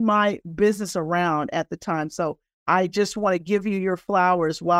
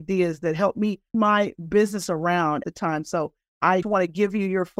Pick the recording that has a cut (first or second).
second